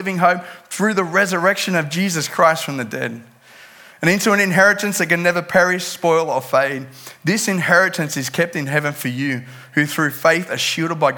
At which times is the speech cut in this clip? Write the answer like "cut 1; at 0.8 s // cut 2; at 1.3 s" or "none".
none